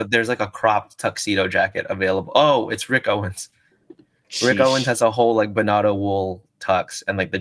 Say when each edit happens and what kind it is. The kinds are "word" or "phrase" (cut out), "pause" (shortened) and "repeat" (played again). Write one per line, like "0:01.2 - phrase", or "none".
none